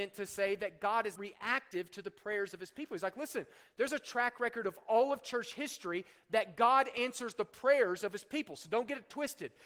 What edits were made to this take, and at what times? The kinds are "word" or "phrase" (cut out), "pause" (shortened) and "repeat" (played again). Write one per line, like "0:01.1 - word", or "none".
0:01.2 - word